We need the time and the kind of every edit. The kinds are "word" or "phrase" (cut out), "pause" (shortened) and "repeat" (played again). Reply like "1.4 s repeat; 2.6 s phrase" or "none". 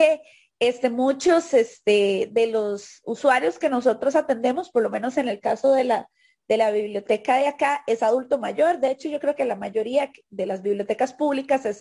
none